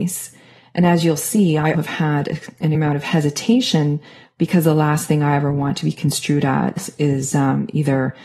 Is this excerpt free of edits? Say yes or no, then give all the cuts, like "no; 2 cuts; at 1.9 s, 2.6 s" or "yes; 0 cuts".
no; 2 cuts; at 1.7 s, 2.7 s